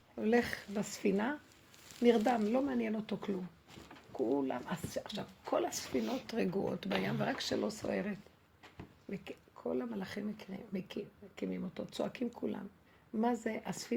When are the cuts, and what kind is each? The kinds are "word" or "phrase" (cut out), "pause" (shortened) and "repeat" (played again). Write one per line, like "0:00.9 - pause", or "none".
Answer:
0:12.9 - pause